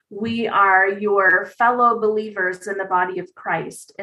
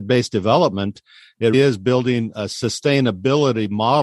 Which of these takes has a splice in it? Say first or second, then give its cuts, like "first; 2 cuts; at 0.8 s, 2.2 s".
second; 1 cut; at 1.5 s